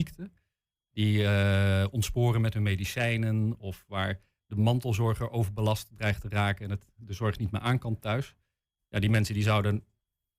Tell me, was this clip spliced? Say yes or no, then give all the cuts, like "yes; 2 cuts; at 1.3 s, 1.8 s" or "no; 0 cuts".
no; 0 cuts